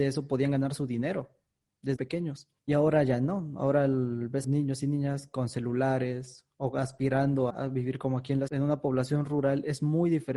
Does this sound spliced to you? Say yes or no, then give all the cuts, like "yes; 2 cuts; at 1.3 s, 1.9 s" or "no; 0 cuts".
yes; 5 cuts; at 2.0 s, 2.6 s, 4.4 s, 7.5 s, 8.5 s